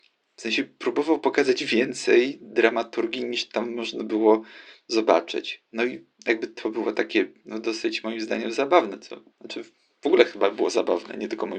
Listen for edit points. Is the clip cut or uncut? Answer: cut